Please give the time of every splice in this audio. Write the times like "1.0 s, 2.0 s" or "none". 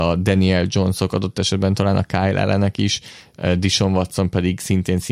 none